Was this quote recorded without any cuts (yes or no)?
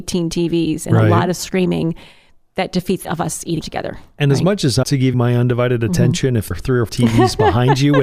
no